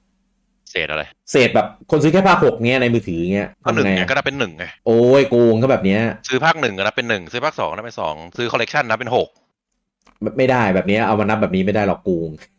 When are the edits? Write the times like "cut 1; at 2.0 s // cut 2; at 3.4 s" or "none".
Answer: cut 1; at 1.1 s // cut 2; at 1.8 s // cut 3; at 3.5 s // cut 4; at 4.8 s